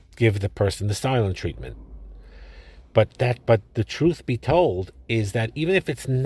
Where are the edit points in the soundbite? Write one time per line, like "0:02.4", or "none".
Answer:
0:03.5